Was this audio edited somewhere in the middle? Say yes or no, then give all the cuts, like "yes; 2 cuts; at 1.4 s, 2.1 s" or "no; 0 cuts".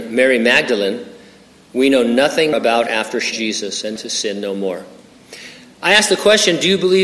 yes; 4 cuts; at 2.5 s, 2.9 s, 3.3 s, 4.0 s